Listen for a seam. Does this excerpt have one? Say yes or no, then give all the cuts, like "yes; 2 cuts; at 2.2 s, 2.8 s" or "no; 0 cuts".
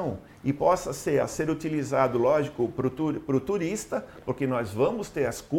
yes; 1 cut; at 1.2 s